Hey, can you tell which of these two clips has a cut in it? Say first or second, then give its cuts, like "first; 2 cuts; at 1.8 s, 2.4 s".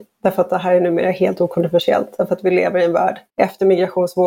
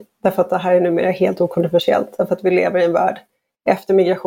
first; 1 cut; at 3.3 s